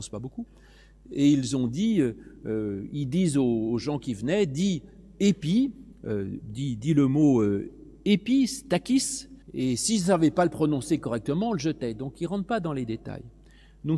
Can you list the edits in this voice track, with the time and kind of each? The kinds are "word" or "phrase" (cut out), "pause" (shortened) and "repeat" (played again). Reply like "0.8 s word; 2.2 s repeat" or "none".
5.9 s pause; 9.4 s pause